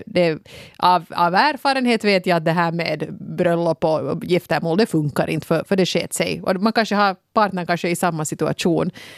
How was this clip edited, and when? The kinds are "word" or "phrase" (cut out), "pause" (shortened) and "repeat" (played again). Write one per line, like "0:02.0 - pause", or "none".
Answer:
none